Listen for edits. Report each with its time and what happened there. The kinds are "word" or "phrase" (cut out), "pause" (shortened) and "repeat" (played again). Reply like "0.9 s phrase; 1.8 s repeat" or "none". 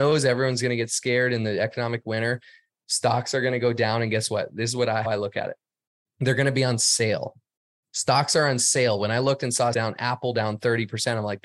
5.0 s word; 9.7 s word